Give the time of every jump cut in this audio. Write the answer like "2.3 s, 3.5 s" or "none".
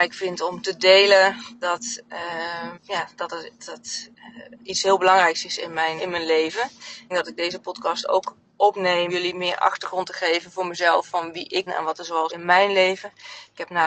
2.7 s, 3.6 s, 4.6 s, 6.0 s, 7.1 s, 9.1 s, 11.7 s, 12.3 s